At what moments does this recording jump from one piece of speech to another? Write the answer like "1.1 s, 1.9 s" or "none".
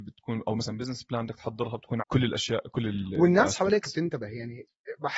2.0 s